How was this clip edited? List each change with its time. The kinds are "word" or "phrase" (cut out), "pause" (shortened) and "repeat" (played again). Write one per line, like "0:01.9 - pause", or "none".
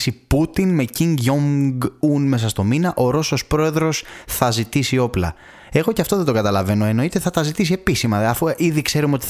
none